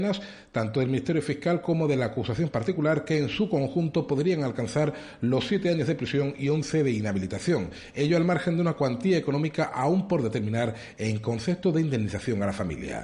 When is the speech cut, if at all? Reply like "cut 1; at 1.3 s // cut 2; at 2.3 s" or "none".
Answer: none